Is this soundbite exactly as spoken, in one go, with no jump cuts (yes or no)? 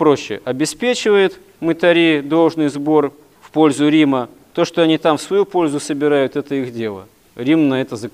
yes